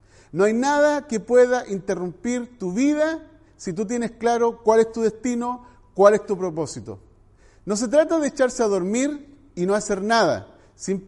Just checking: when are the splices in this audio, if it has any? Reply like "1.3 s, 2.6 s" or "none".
none